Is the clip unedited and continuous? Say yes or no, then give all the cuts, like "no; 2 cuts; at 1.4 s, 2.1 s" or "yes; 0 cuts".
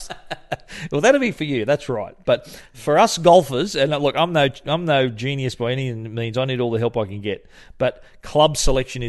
yes; 0 cuts